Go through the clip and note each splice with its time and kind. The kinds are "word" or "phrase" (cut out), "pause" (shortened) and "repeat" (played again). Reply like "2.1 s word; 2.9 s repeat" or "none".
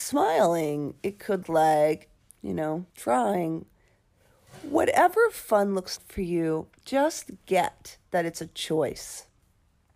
1.4 s word; 2.2 s pause; 2.9 s pause; 6.0 s word; 6.8 s pause